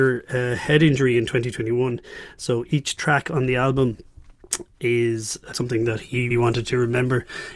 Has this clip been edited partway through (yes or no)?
yes